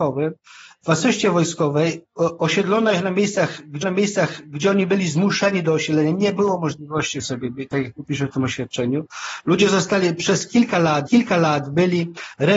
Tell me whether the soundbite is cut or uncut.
cut